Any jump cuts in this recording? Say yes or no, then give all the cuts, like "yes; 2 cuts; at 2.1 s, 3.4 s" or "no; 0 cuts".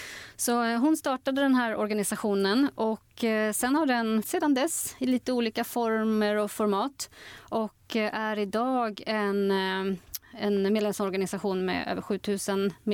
yes; 1 cut; at 4.2 s